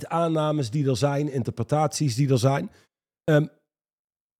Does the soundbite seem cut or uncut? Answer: uncut